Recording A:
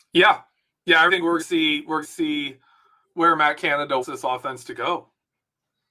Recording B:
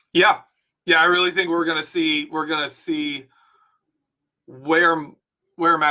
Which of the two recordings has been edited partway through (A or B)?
A